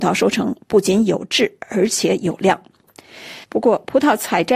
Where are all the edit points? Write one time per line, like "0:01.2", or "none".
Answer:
0:03.4